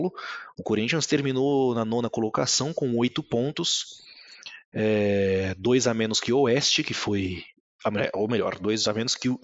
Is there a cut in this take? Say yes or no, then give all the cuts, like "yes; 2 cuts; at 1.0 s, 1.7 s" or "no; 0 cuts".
no; 0 cuts